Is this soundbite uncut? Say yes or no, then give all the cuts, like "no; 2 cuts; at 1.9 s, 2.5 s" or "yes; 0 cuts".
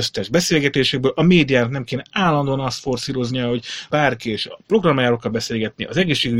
no; 1 cut; at 3.9 s